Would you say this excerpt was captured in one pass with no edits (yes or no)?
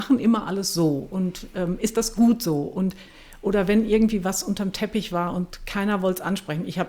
yes